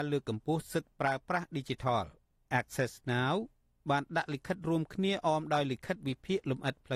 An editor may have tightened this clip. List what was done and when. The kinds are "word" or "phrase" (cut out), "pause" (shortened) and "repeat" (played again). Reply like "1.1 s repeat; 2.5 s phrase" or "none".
none